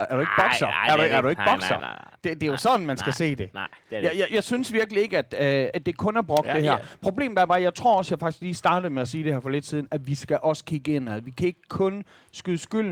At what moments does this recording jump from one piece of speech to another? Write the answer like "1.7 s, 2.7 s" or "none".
1.8 s, 4.3 s, 5.7 s

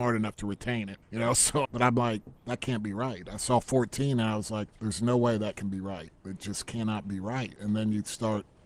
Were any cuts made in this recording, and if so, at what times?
1.0 s, 1.6 s, 2.4 s, 4.8 s

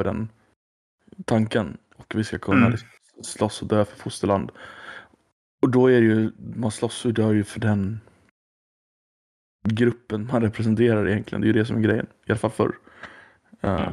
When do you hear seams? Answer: none

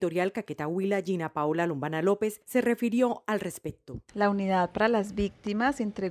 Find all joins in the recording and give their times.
none

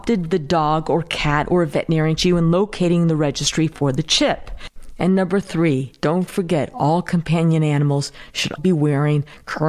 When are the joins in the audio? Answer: 2.2 s, 8.6 s

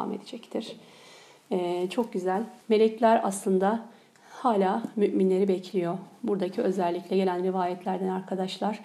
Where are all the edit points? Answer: 2.6 s

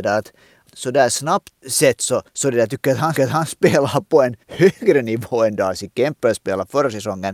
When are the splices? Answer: 1.6 s, 2.3 s, 3.2 s, 4.4 s

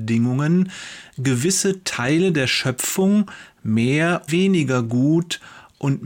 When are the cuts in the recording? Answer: 4.3 s

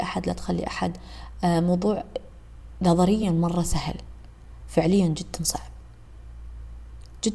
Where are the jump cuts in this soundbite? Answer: none

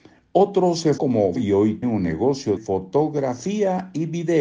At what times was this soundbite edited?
1.0 s, 1.4 s, 1.8 s, 2.6 s

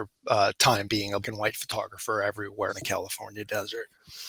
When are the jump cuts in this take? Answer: 1.2 s, 2.7 s

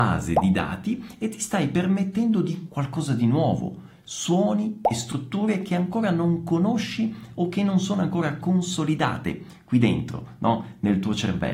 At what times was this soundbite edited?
2.7 s

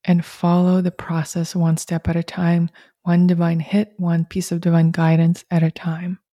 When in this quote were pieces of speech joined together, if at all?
none

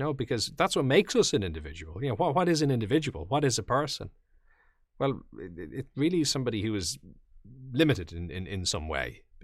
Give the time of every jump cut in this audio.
none

